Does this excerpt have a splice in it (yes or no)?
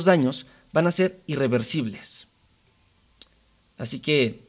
no